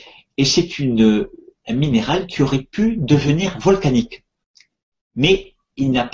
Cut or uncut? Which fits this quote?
uncut